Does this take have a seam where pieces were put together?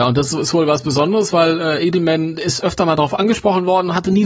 no; 0 cuts

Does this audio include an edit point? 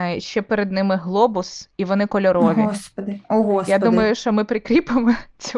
no; 0 cuts

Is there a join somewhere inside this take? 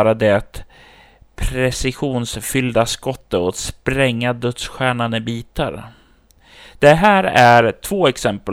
no; 0 cuts

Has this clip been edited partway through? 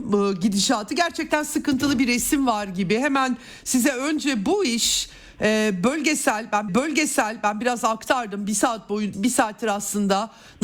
yes; 2 cuts; at 6.7 s, 9.1 s

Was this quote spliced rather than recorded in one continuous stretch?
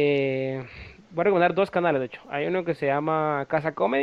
no; 0 cuts

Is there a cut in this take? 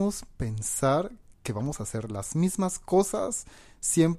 no; 0 cuts

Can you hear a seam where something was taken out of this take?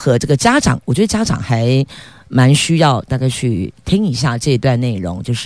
no; 0 cuts

